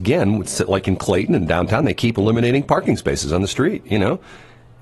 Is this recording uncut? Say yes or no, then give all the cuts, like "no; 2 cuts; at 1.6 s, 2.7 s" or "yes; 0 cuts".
yes; 0 cuts